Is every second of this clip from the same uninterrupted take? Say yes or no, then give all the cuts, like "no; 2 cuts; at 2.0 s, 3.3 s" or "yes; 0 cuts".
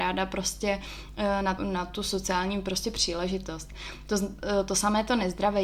no; 1 cut; at 1.6 s